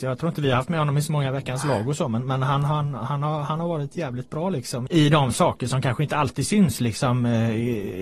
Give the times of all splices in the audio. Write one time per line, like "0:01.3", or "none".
0:04.9